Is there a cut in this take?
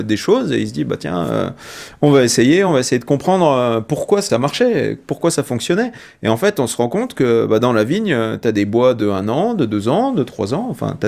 no; 0 cuts

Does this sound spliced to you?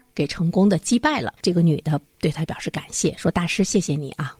yes; 1 cut; at 1.4 s

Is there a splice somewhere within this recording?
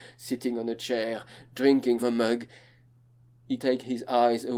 yes; 2 cuts; at 2.0 s, 3.6 s

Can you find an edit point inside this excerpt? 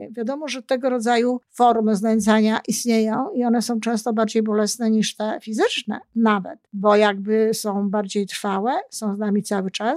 yes; 2 cuts; at 1.4 s, 6.7 s

